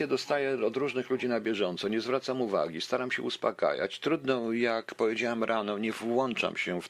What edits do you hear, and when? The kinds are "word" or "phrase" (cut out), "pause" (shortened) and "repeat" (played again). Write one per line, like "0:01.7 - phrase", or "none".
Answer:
none